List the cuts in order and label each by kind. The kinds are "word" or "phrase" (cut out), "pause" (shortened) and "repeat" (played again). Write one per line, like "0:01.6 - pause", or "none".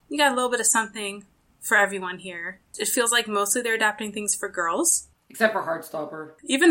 none